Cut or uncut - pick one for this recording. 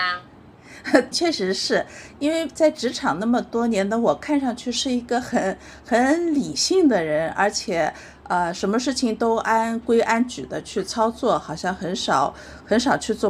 cut